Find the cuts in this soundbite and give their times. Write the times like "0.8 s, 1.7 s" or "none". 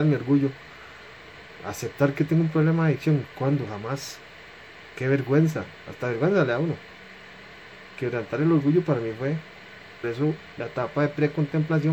10.0 s